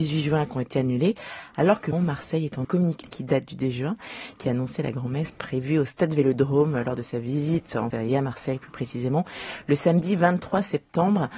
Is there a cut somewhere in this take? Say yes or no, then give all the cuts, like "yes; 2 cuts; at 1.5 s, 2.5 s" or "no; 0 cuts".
yes; 4 cuts; at 1.9 s, 2.6 s, 3.0 s, 7.9 s